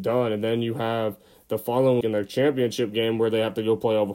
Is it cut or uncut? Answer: cut